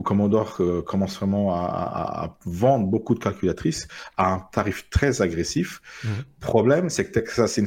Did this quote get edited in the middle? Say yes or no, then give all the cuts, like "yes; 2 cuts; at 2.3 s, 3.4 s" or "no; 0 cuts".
no; 0 cuts